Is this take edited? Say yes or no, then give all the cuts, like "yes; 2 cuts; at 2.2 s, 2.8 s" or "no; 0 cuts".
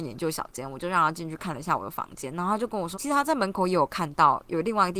yes; 1 cut; at 2.9 s